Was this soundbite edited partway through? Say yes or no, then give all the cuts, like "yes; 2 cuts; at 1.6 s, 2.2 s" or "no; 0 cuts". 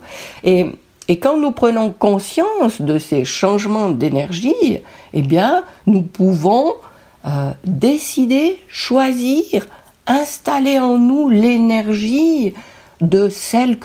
no; 0 cuts